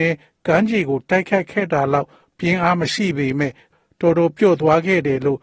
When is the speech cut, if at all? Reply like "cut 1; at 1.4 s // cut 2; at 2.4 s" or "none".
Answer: none